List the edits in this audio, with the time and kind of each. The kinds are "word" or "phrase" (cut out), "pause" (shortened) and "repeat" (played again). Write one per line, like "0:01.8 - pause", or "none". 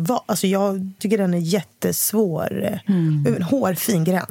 0:01.0 - word